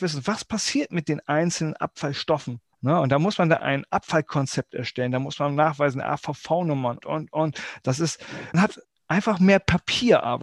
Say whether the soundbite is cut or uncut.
cut